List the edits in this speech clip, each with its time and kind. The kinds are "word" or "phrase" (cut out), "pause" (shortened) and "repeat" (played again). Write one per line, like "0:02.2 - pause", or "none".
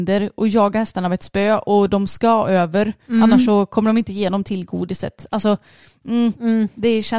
none